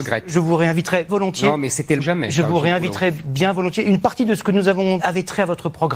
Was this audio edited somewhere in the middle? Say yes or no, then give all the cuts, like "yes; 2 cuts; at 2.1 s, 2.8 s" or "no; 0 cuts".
yes; 3 cuts; at 1.1 s, 2.0 s, 5.0 s